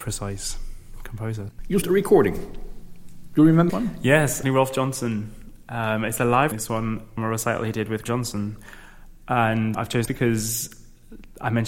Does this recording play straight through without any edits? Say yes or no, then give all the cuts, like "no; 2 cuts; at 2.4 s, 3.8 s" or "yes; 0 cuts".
no; 8 cuts; at 1.8 s, 3.7 s, 4.4 s, 6.5 s, 7.2 s, 8.1 s, 9.7 s, 10.1 s